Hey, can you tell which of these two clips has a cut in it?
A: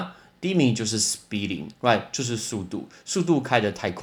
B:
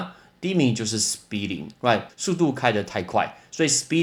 B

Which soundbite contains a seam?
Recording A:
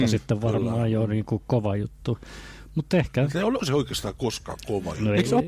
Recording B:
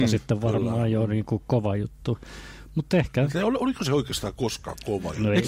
A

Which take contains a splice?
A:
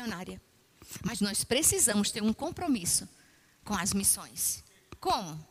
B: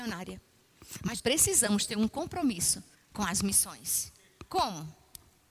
B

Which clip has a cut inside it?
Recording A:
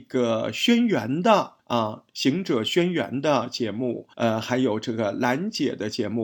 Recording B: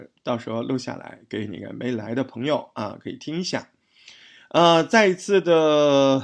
A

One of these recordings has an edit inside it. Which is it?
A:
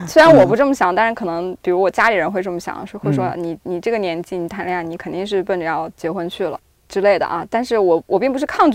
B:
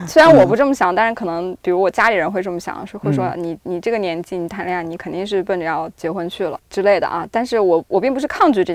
B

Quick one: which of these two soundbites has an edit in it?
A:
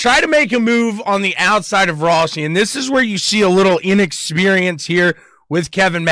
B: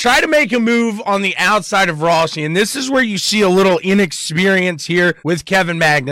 B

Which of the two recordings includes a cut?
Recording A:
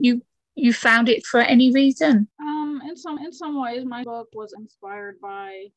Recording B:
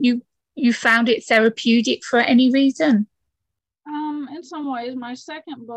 A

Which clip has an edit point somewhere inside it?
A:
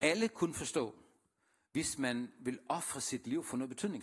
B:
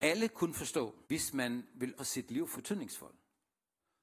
B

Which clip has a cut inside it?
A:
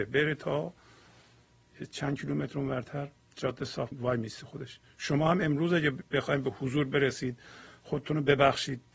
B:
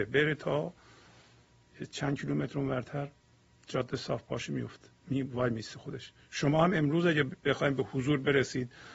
A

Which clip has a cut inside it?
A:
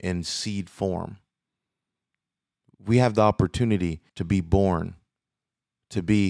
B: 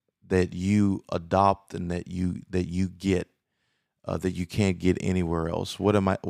A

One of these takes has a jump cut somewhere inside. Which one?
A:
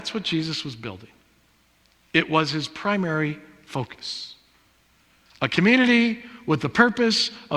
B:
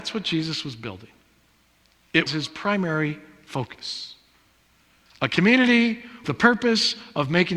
B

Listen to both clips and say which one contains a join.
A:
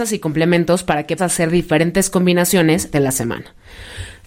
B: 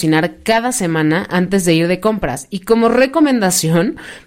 A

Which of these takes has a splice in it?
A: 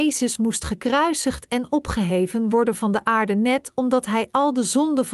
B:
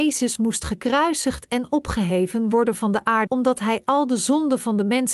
B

